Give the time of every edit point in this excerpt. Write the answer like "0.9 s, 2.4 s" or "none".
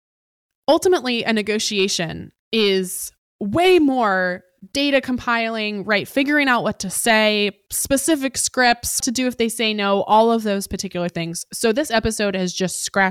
2.4 s, 9.0 s